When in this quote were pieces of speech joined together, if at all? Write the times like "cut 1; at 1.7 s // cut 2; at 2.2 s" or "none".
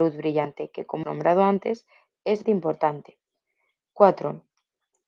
cut 1; at 1.0 s // cut 2; at 2.4 s